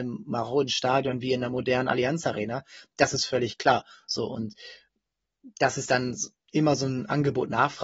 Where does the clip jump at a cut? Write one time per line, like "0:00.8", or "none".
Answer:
none